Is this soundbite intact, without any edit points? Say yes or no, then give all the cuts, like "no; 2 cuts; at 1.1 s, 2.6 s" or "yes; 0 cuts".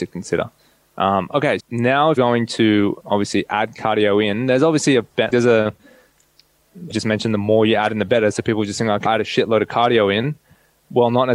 no; 6 cuts; at 1.6 s, 2.2 s, 3.0 s, 5.3 s, 6.9 s, 9.0 s